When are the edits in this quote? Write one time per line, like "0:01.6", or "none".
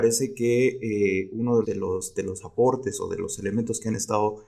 0:01.6